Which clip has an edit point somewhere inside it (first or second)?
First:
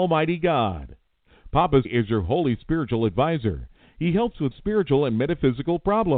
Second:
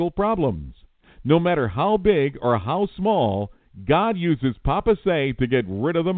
first